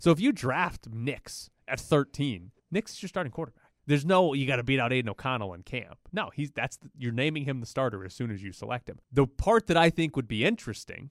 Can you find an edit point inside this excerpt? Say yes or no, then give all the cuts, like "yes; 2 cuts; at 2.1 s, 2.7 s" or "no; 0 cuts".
yes; 3 cuts; at 2.6 s, 3.8 s, 9.0 s